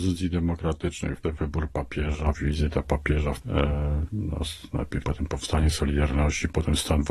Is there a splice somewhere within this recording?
yes; 5 cuts; at 1.2 s, 2.3 s, 3.4 s, 4.1 s, 5.0 s

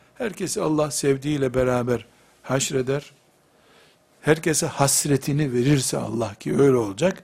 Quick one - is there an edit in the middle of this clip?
no; 0 cuts

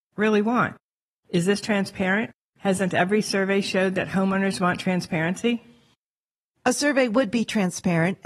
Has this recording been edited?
no; 0 cuts

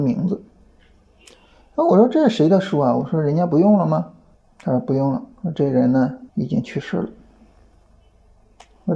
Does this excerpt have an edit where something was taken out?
yes; 3 cuts; at 4.3 s, 5.3 s, 6.3 s

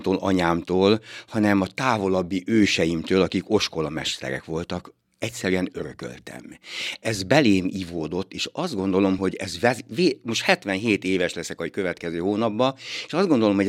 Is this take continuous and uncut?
yes; 0 cuts

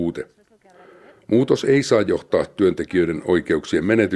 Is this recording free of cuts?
yes; 0 cuts

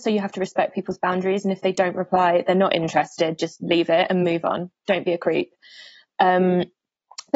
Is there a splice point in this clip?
no; 0 cuts

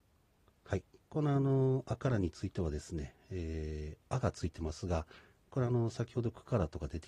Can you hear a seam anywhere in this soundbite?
no; 0 cuts

